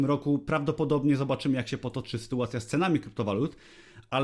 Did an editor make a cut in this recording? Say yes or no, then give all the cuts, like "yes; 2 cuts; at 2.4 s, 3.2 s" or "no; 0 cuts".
no; 0 cuts